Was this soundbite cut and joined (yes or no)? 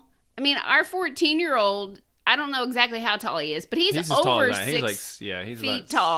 no